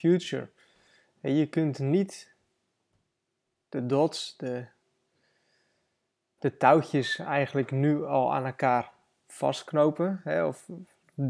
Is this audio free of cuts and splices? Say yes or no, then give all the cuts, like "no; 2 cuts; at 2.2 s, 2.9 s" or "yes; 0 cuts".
yes; 0 cuts